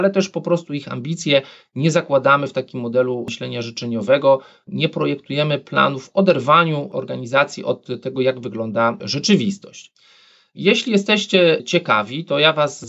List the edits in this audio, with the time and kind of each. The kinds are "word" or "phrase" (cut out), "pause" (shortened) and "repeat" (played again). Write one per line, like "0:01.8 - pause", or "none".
none